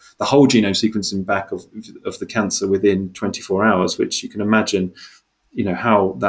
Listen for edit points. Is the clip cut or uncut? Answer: uncut